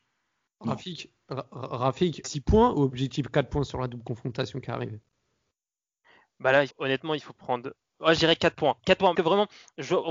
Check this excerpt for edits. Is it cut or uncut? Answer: cut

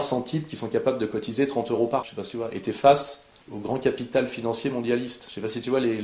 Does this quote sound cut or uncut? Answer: cut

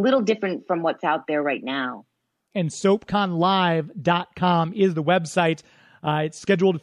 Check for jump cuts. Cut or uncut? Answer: uncut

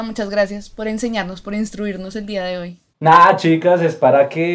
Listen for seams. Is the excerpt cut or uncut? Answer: uncut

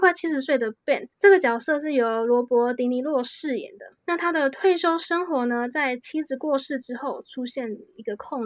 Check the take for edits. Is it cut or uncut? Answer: cut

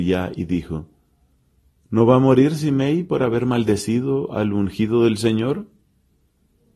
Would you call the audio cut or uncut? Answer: uncut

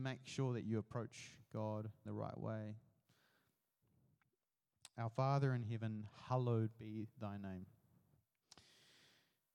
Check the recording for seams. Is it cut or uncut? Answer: cut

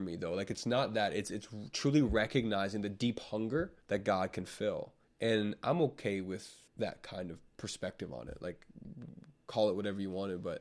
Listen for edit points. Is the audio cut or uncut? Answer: cut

